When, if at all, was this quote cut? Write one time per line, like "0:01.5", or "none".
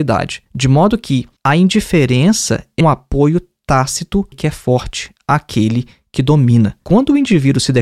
0:02.8
0:04.3